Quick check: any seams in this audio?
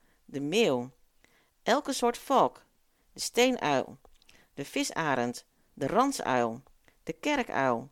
no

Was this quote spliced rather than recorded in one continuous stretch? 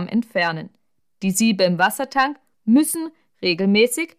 no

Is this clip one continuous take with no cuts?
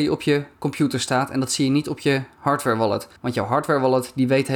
no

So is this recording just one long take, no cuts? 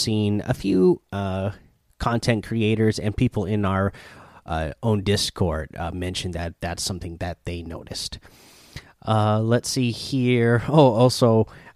yes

